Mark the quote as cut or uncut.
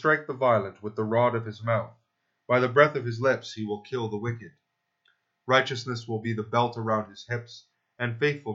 uncut